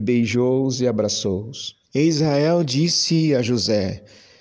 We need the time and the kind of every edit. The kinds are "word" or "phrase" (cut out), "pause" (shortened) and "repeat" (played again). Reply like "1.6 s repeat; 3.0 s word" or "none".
1.9 s pause